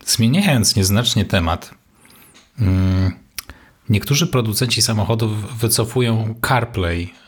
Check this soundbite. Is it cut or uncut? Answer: uncut